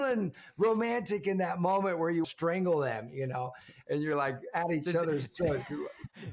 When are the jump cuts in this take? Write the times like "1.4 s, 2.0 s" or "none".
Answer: 2.2 s